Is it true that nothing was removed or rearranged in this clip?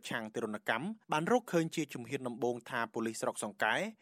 no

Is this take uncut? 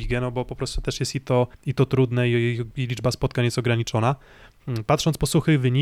no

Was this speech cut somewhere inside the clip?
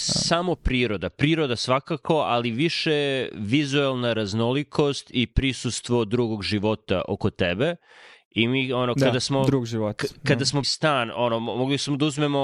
yes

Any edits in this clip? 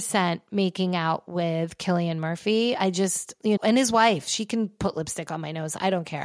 yes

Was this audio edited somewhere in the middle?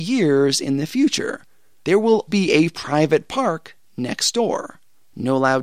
yes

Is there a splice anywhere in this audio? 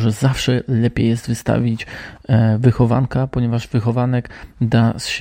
no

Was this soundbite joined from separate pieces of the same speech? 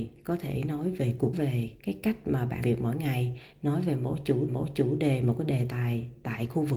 yes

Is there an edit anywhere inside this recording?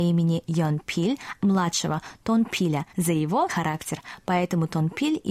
yes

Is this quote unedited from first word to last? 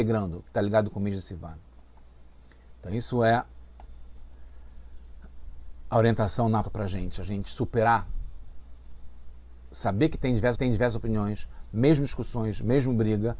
no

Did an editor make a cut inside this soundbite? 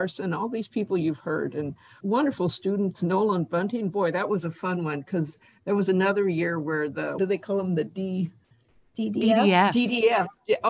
yes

